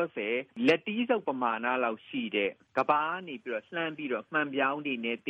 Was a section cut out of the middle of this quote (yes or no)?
no